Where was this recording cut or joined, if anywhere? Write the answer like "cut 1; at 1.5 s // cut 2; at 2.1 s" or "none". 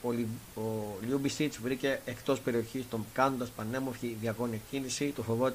cut 1; at 3.1 s